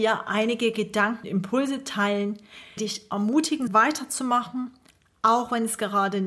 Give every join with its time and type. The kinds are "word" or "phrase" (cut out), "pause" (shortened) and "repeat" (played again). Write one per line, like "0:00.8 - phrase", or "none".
0:01.2 - word
0:02.8 - word
0:03.7 - word